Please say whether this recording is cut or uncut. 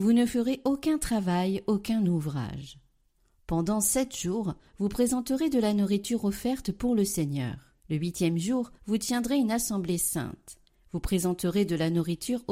cut